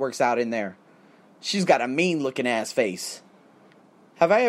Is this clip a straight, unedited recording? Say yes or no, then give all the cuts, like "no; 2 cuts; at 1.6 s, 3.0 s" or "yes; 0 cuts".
yes; 0 cuts